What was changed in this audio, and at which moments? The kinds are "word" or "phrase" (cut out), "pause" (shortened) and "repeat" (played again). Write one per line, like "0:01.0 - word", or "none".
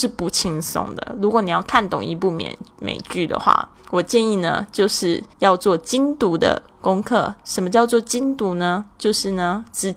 0:03.8 - pause
0:05.3 - pause